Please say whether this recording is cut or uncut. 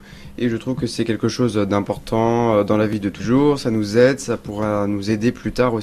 cut